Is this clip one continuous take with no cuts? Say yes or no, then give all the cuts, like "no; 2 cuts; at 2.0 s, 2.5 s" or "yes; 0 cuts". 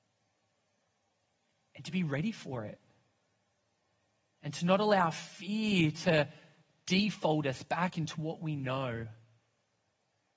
yes; 0 cuts